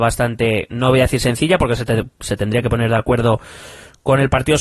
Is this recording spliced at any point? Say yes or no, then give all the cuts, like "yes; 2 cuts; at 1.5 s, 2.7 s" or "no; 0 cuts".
no; 0 cuts